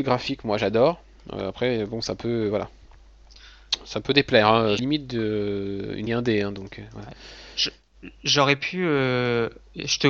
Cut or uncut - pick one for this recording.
cut